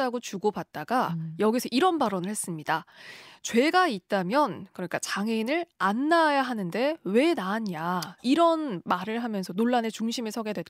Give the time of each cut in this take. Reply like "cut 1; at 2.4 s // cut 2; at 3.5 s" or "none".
cut 1; at 8.2 s